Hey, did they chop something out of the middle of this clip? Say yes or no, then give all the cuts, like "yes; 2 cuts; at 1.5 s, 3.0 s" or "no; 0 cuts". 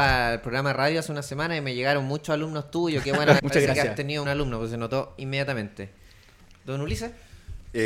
yes; 2 cuts; at 3.4 s, 4.2 s